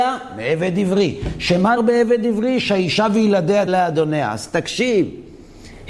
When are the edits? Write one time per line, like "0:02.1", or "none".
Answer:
0:01.8
0:03.7

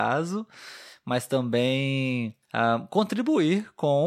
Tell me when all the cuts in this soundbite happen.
0:02.4

